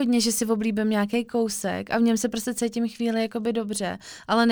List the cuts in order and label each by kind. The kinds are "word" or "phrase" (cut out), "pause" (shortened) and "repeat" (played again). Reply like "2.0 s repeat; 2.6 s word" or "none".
none